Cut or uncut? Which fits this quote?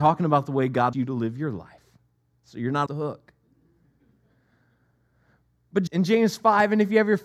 cut